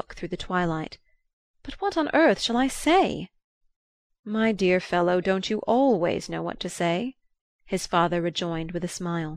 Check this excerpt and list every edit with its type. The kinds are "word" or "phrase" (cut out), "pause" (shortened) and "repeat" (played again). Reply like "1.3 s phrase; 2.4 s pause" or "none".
none